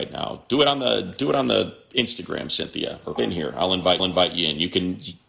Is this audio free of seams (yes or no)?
no